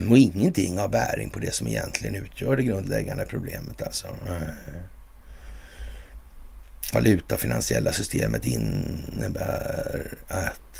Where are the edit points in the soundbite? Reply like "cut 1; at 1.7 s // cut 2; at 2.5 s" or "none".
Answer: cut 1; at 6.9 s